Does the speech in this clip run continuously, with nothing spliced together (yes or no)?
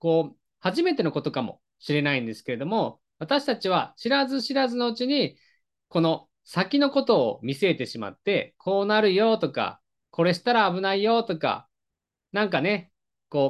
yes